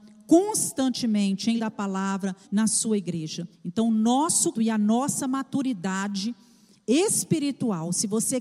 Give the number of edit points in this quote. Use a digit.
4